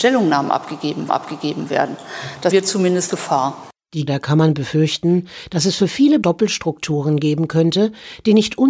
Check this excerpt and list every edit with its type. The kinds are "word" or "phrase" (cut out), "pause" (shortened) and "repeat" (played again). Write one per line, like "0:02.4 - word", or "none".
0:01.1 - repeat
0:02.5 - word
0:03.1 - word
0:04.1 - word
0:06.2 - word